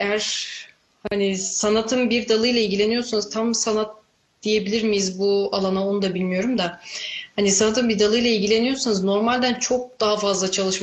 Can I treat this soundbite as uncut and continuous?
yes; 0 cuts

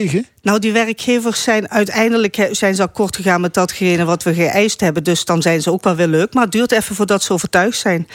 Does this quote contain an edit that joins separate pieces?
no; 0 cuts

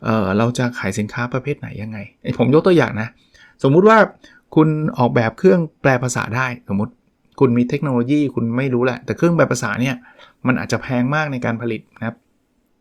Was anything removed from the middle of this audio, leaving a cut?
no; 0 cuts

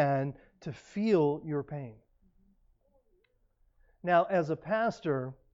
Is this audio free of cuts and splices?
yes; 0 cuts

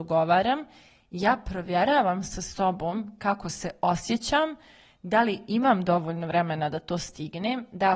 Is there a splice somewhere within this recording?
no; 0 cuts

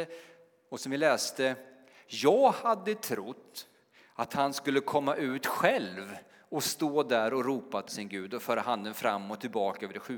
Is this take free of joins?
no; 1 cut; at 7.9 s

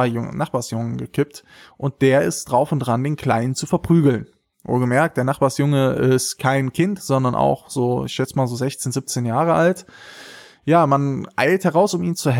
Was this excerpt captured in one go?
yes; 0 cuts

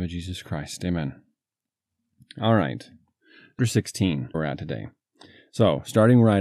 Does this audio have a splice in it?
yes; 2 cuts; at 3.6 s, 4.3 s

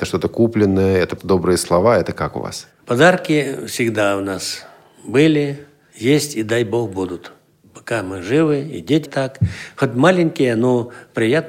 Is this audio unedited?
no; 2 cuts; at 1.2 s, 9.1 s

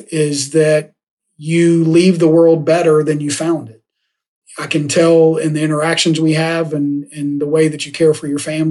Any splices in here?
no; 0 cuts

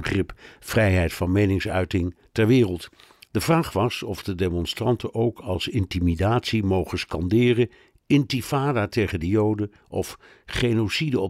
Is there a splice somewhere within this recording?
no; 0 cuts

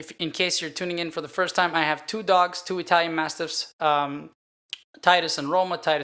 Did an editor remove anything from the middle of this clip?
no; 0 cuts

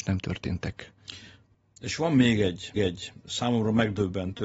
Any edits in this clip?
yes; 1 cut; at 2.8 s

